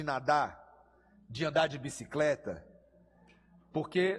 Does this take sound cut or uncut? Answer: uncut